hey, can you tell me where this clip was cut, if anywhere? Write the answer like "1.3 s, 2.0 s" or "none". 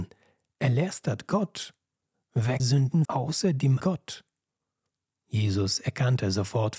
2.6 s, 3.0 s, 3.8 s